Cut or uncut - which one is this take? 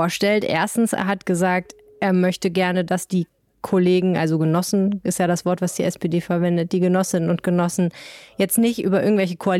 uncut